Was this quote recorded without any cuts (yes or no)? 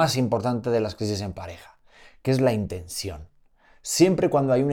yes